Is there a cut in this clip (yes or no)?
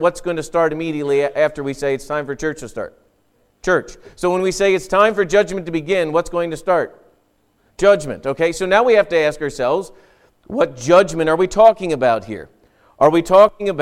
no